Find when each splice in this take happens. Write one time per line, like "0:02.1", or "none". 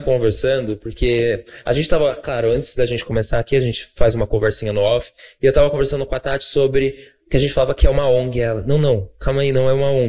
none